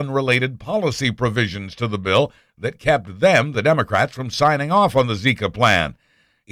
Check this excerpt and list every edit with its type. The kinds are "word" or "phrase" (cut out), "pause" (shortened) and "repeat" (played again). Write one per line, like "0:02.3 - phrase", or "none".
none